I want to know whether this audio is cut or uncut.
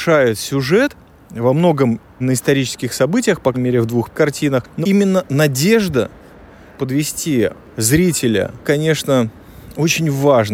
cut